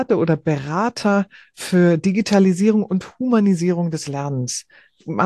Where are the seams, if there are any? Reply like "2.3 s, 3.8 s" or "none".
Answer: none